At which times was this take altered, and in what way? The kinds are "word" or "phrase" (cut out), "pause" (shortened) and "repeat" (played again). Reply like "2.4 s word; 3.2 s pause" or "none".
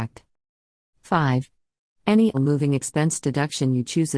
2.3 s word